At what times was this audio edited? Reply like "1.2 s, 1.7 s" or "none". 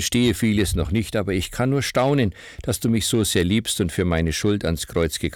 none